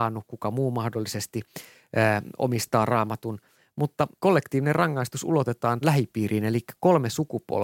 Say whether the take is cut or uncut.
cut